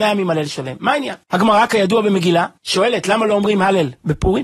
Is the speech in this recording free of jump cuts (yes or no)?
no